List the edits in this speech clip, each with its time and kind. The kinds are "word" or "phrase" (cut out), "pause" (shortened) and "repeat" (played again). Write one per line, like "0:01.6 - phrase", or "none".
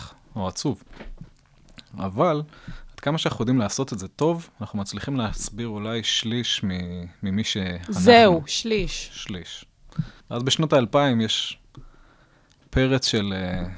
0:10.2 - pause